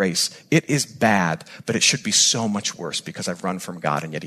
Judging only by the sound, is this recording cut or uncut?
uncut